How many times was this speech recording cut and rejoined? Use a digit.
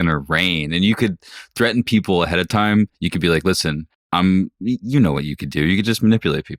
2